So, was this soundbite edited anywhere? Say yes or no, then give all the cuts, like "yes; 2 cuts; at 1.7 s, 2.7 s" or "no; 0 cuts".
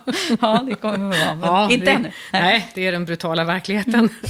no; 0 cuts